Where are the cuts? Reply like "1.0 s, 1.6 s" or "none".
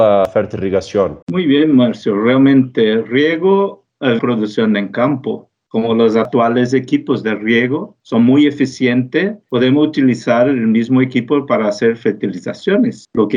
1.2 s, 4.2 s